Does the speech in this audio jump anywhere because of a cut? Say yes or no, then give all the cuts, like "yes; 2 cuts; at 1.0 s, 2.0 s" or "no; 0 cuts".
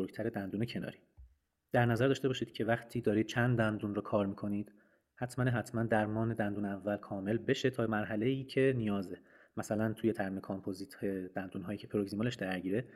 no; 0 cuts